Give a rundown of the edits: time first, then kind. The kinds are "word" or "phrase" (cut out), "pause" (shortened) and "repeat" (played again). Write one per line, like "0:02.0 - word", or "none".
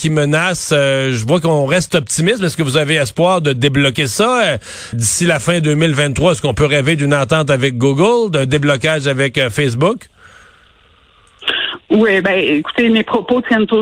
0:04.9 - word